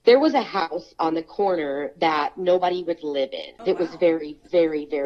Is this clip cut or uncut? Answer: cut